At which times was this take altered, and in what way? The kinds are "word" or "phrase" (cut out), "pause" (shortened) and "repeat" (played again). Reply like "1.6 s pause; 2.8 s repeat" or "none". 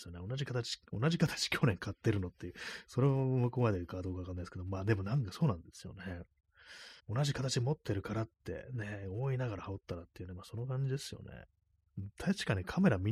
7.0 s pause